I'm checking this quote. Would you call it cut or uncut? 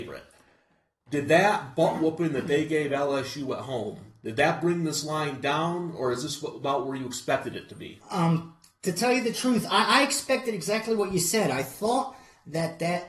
uncut